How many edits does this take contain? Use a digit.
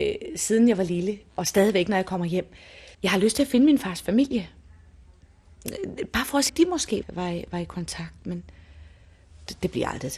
3